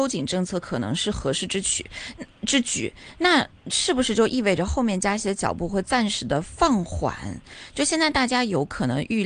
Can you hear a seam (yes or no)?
no